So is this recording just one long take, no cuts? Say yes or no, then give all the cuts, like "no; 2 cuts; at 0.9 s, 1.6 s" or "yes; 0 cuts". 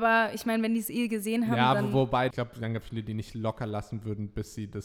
no; 2 cuts; at 2.3 s, 2.8 s